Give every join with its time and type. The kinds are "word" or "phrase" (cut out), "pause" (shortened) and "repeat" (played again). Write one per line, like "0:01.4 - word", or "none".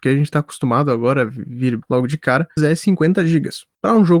0:01.8 - phrase
0:02.6 - word